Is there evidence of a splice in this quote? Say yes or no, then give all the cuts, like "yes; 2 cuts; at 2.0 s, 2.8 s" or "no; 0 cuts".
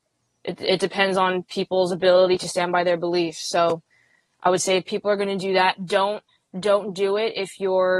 no; 0 cuts